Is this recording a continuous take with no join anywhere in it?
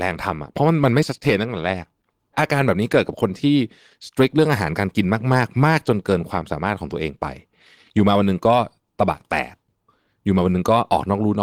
yes; 0 cuts

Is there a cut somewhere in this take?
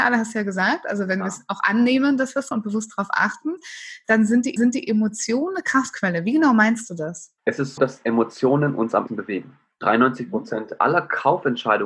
yes; 5 cuts; at 2.5 s, 4.6 s, 7.4 s, 7.8 s, 9.1 s

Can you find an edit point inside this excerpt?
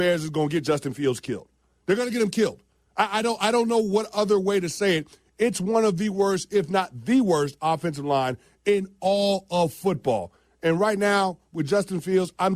no; 0 cuts

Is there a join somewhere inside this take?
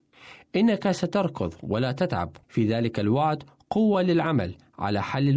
yes; 1 cut; at 2.4 s

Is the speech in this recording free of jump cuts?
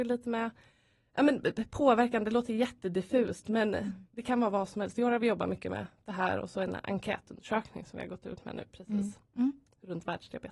no; 1 cut; at 4.1 s

